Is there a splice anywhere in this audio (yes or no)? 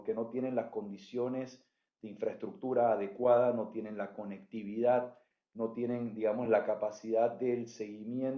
no